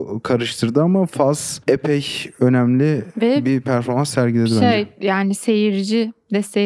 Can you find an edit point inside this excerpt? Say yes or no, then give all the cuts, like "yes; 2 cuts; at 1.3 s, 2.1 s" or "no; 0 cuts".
no; 0 cuts